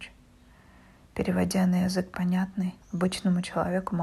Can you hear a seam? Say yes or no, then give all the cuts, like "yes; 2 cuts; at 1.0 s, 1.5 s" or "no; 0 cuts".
yes; 1 cut; at 2.8 s